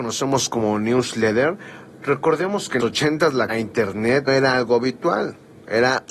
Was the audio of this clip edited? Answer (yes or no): yes